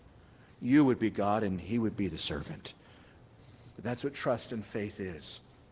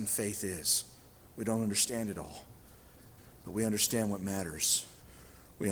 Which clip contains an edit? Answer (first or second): first